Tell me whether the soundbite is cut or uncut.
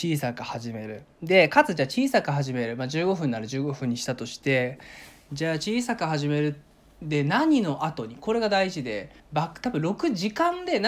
cut